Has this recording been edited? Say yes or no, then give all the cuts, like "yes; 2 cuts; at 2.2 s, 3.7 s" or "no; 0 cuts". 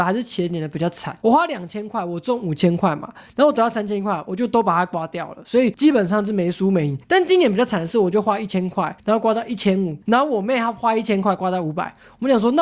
yes; 3 cuts; at 7.0 s, 9.0 s, 10.0 s